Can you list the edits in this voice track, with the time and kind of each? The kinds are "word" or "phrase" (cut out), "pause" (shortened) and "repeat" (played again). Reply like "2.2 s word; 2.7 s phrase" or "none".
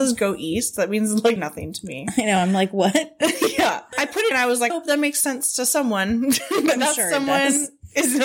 1.4 s word; 4.3 s phrase; 4.7 s word